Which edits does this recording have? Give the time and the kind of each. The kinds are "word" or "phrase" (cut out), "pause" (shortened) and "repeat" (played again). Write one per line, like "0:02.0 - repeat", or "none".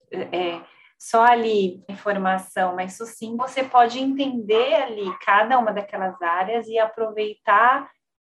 0:01.9 - word
0:03.4 - word